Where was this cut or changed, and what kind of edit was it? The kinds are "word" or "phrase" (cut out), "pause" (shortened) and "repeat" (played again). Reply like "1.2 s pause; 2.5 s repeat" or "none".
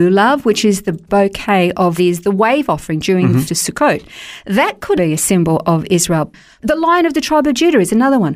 2.0 s phrase; 3.5 s word; 5.0 s word